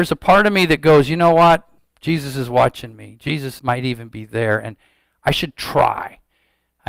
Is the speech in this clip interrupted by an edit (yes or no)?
yes